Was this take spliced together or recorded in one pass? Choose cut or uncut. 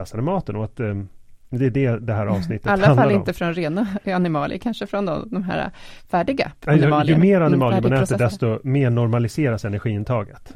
uncut